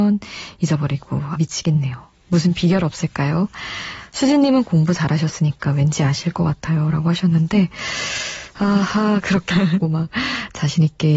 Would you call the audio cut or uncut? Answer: cut